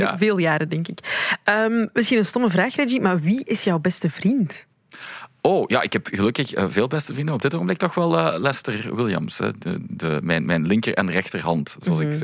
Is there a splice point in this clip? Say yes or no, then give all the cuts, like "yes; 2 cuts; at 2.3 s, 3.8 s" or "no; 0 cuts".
no; 0 cuts